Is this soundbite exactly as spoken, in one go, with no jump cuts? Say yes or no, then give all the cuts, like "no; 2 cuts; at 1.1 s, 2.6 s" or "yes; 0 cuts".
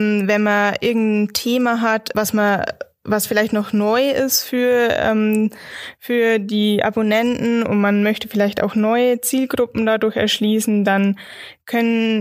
no; 1 cut; at 2.1 s